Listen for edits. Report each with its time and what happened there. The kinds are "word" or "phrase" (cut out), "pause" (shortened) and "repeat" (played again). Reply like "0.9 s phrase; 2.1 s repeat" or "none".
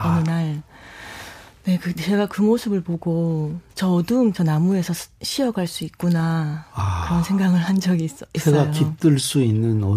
3.7 s pause; 4.3 s phrase